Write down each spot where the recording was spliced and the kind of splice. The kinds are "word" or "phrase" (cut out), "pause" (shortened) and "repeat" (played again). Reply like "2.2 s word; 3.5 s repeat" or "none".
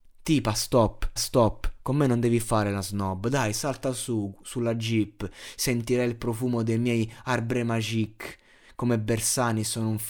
1.2 s repeat